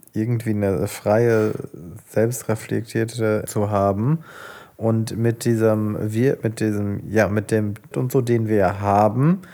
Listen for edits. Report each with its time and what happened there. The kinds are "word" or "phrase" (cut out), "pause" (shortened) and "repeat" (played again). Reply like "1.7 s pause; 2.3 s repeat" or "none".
3.5 s word; 7.9 s word